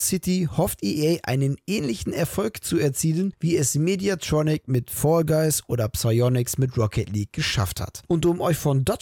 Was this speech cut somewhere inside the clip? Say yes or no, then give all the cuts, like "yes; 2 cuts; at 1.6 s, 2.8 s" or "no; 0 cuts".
no; 0 cuts